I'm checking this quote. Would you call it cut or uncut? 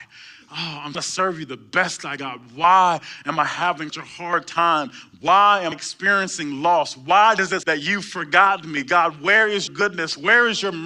cut